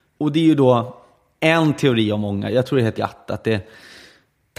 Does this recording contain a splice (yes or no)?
yes